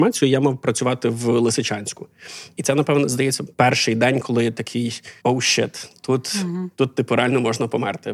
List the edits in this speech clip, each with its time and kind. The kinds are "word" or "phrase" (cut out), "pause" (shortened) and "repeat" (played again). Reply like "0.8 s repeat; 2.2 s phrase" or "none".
3.5 s pause; 5.2 s pause